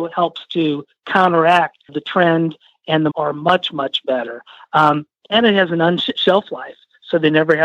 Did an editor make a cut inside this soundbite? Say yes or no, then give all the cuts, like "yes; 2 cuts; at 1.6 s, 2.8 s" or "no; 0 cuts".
yes; 3 cuts; at 1.9 s, 3.1 s, 6.1 s